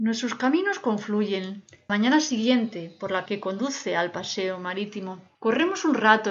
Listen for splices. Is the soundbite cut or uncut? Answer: cut